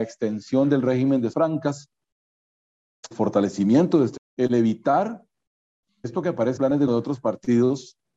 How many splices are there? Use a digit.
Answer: 6